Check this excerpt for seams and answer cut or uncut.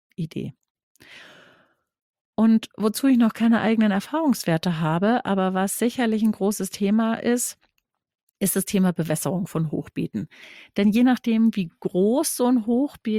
uncut